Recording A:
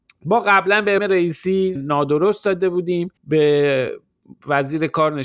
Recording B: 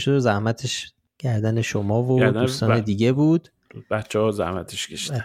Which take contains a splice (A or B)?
A